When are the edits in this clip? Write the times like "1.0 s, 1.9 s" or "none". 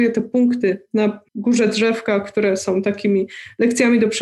1.3 s